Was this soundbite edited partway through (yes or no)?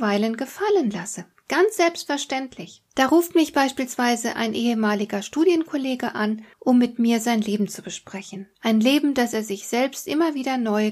yes